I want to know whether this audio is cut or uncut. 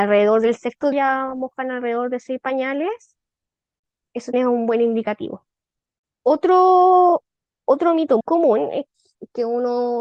cut